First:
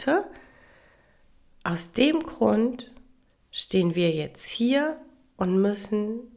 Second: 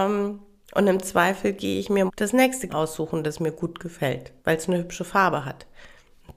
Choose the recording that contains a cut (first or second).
second